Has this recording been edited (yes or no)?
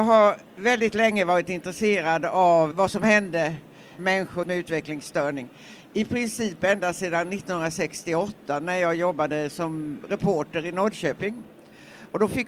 yes